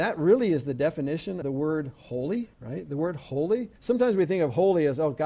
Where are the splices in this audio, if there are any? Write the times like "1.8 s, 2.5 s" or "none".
1.4 s, 2.5 s, 3.8 s